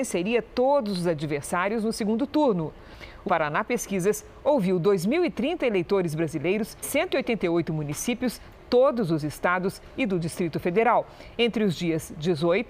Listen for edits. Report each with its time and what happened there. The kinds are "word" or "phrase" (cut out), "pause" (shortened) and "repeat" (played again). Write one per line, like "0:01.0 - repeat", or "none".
0:03.3 - word
0:06.8 - word
0:08.5 - word